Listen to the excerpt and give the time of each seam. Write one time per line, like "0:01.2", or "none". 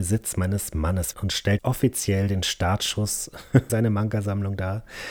0:01.1
0:01.6
0:03.7